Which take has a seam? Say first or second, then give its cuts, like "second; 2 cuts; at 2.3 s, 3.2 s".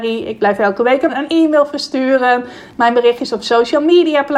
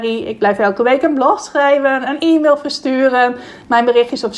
first; 1 cut; at 1.1 s